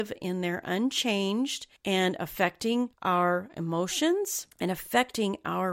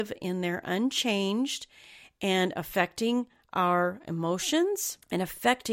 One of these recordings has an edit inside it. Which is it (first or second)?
first